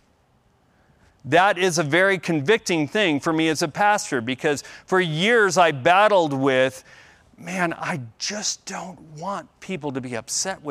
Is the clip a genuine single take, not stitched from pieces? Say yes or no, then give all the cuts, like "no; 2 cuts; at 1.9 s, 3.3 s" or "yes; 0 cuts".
yes; 0 cuts